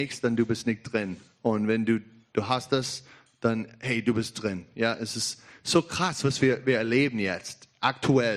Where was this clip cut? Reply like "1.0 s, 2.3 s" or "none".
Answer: none